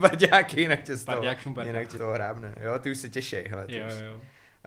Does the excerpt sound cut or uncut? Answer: cut